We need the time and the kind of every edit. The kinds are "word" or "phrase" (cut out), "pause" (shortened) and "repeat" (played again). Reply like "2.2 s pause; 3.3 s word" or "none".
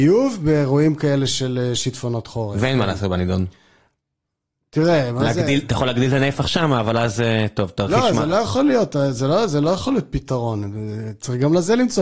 none